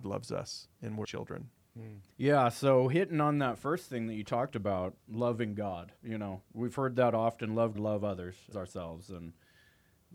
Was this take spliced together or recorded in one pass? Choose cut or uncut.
cut